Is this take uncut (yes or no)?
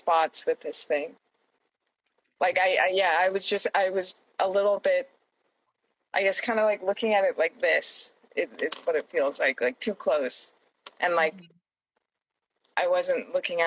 yes